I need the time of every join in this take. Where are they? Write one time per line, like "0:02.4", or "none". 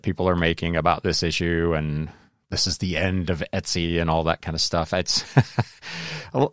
none